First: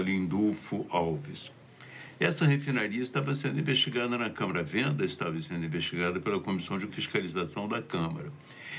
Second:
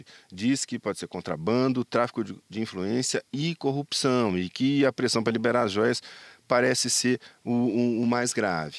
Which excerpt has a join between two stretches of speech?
first; 1 cut; at 6.9 s

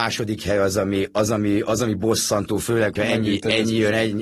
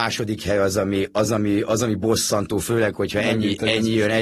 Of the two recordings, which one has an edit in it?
first; 1 cut; at 3.0 s

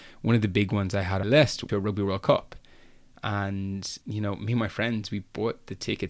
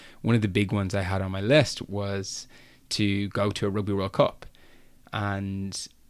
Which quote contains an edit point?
first; 3 cuts; at 1.2 s, 1.7 s, 4.0 s

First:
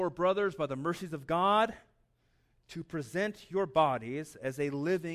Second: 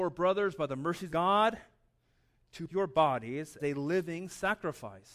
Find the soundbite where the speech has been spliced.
second; 3 cuts; at 1.1 s, 2.7 s, 3.6 s

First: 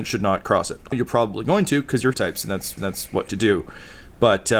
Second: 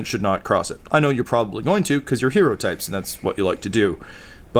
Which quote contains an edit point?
first; 4 cuts; at 0.9 s, 2.1 s, 2.8 s, 3.3 s

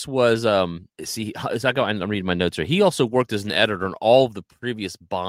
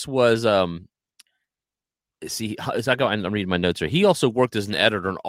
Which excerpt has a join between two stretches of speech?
first; 1 cut; at 0.9 s

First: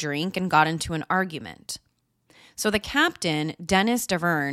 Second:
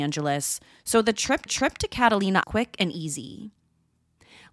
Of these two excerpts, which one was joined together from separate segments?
second; 2 cuts; at 1.5 s, 2.4 s

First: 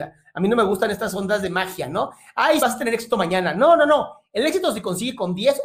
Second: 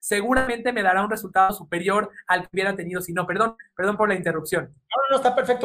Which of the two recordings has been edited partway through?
first; 1 cut; at 2.6 s

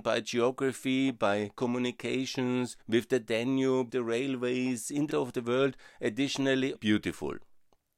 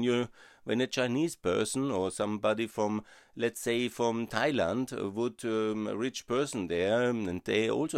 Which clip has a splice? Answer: first; 4 cuts; at 2.8 s, 3.9 s, 5.1 s, 6.7 s

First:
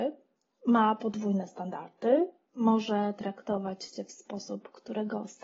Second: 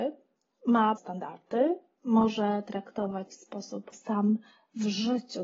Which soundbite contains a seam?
second; 3 cuts; at 1.0 s, 3.3 s, 3.9 s

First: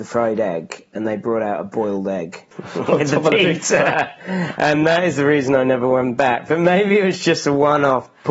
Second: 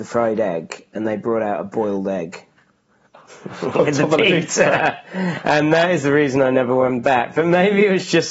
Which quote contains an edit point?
first; 1 cut; at 2.5 s

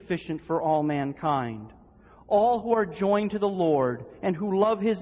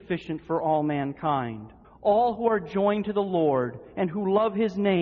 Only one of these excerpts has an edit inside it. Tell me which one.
second; 1 cut; at 1.8 s

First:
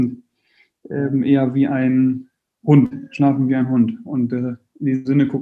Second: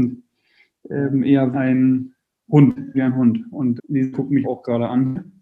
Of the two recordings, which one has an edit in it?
second; 5 cuts; at 1.5 s, 2.9 s, 3.8 s, 4.1 s, 4.4 s

